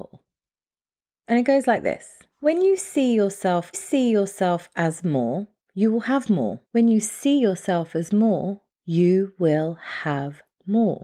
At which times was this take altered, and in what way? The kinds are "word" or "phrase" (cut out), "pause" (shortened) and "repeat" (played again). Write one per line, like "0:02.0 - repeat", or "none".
0:02.3 - pause
0:03.7 - repeat
0:05.6 - pause
0:06.6 - pause
0:08.7 - pause